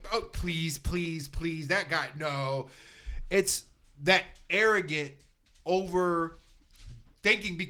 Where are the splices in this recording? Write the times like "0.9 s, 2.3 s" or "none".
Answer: none